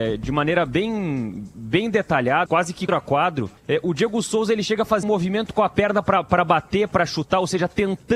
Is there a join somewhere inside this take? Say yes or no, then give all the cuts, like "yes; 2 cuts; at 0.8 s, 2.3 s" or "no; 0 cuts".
yes; 4 cuts; at 2.5 s, 2.9 s, 3.6 s, 5.0 s